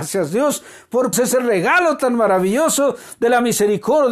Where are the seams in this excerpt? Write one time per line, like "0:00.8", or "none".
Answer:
0:01.1